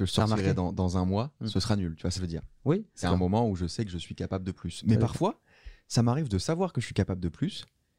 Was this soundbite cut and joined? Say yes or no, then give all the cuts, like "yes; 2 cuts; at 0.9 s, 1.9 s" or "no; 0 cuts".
yes; 3 cuts; at 1.4 s, 2.2 s, 3.0 s